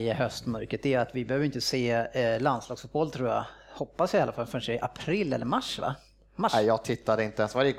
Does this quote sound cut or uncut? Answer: uncut